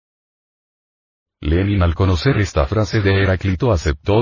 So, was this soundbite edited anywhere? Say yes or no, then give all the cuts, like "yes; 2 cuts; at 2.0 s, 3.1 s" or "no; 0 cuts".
no; 0 cuts